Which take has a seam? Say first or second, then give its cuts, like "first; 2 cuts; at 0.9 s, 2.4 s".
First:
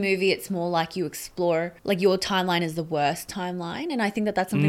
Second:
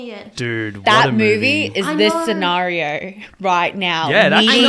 first; 1 cut; at 1.8 s